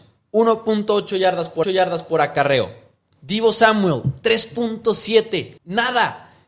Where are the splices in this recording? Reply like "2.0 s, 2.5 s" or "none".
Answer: 1.6 s, 5.6 s

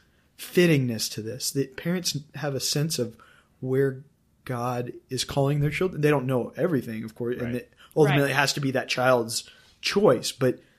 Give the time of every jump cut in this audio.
none

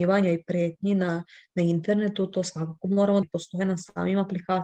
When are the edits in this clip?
3.2 s

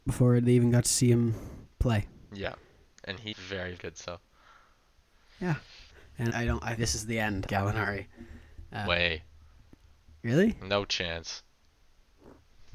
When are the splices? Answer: 3.3 s, 3.8 s, 6.3 s, 6.8 s, 7.5 s, 8.9 s

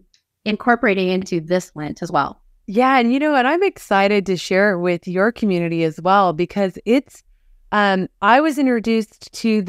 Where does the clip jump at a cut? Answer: none

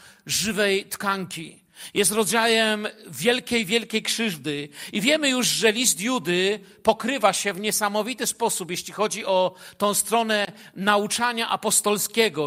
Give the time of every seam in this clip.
none

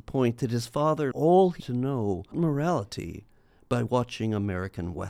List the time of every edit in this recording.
1.1 s, 1.6 s, 2.3 s

